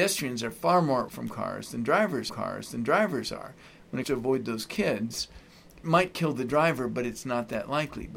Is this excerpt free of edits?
no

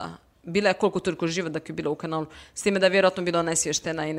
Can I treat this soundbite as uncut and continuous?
yes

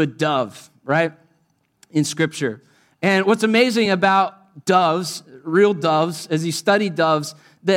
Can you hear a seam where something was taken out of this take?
no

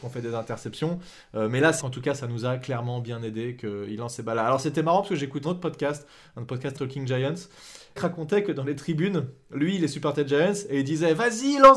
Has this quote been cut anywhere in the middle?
yes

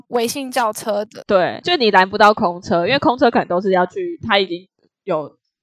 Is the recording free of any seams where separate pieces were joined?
yes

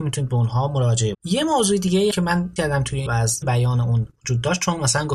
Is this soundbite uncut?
no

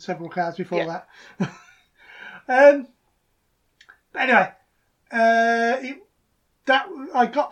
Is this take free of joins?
yes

